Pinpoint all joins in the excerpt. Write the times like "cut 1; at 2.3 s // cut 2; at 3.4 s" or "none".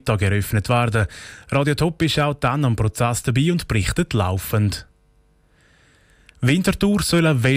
none